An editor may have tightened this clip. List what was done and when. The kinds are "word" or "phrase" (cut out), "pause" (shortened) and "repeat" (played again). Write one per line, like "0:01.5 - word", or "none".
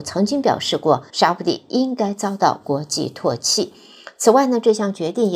0:01.1 - pause